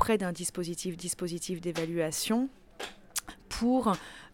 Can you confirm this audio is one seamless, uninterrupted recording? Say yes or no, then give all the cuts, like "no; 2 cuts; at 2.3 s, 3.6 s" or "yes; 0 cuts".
no; 1 cut; at 1.0 s